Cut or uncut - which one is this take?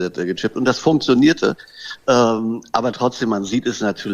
uncut